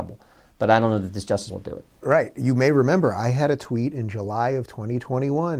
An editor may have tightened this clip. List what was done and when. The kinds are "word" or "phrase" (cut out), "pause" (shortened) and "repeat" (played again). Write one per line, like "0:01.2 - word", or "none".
0:01.5 - word